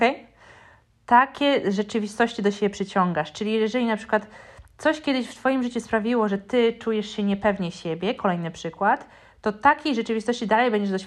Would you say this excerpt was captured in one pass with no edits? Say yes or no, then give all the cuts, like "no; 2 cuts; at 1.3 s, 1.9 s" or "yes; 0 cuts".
yes; 0 cuts